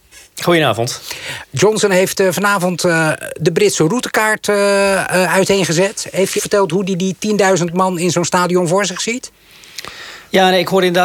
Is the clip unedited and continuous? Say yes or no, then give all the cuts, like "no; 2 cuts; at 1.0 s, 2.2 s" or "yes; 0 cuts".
no; 1 cut; at 6.4 s